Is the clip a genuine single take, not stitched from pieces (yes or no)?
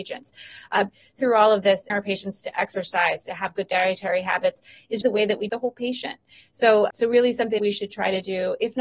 no